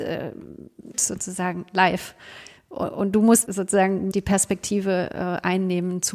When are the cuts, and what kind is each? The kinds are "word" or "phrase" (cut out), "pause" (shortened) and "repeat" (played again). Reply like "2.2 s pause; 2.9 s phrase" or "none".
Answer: 0.9 s word; 3.5 s word; 4.1 s word